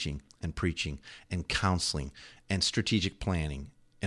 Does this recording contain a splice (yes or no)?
no